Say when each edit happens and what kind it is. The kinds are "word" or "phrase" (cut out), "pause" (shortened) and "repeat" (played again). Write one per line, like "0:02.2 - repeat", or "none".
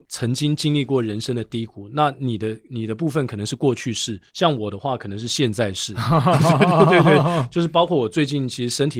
0:04.3 - pause